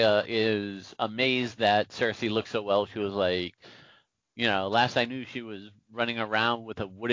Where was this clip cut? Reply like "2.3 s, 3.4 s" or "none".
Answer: none